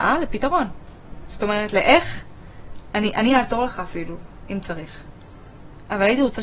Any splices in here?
no; 0 cuts

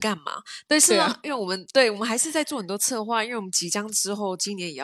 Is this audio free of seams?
yes; 0 cuts

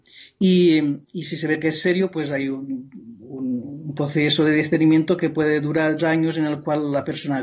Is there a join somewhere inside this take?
yes; 2 cuts; at 1.0 s, 6.0 s

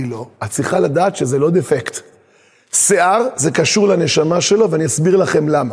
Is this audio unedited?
yes; 0 cuts

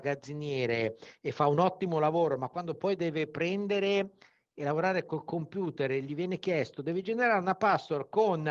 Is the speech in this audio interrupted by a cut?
no; 0 cuts

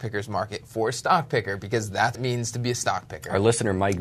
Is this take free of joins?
no; 1 cut; at 2.1 s

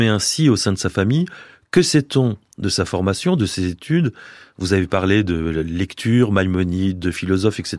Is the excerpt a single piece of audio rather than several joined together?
yes; 0 cuts

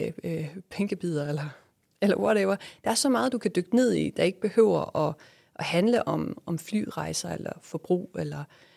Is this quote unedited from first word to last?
yes; 0 cuts

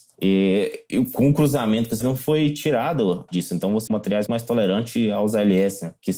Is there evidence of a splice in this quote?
yes; 4 cuts; at 2.0 s, 3.3 s, 3.9 s, 4.3 s

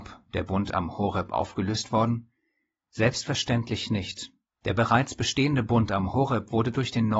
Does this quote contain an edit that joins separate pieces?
yes; 1 cut; at 4.5 s

